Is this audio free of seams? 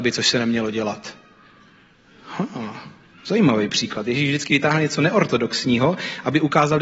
yes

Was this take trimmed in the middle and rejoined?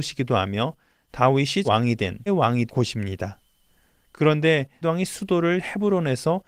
yes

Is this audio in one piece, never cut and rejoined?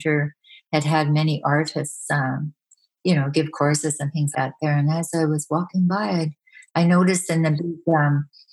no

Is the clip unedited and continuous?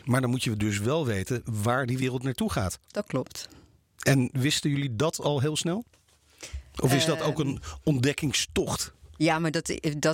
yes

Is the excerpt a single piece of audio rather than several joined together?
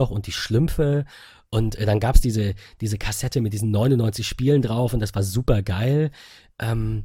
yes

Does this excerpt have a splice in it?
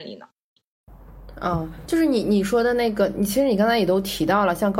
no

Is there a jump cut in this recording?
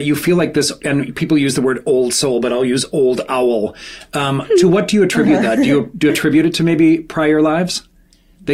no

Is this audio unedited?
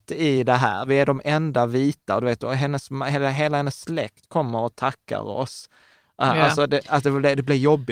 yes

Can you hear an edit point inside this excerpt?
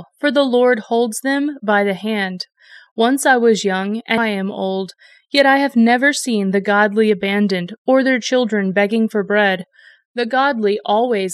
yes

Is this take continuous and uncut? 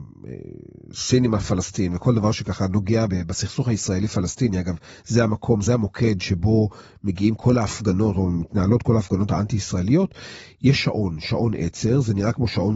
no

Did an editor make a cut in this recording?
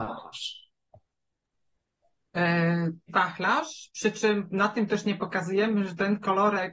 yes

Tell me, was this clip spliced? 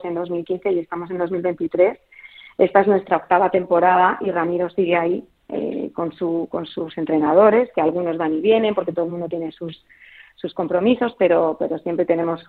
no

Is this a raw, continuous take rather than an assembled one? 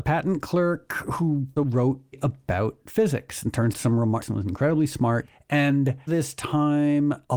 no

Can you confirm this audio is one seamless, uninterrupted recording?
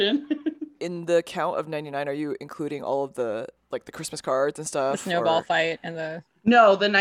yes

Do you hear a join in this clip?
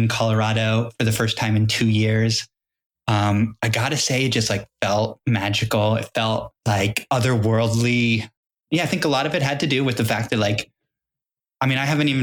no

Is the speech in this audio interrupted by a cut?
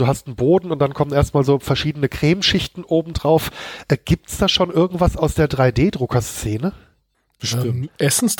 no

